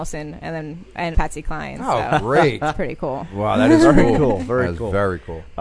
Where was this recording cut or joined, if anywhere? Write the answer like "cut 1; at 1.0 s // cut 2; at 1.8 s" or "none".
cut 1; at 1.1 s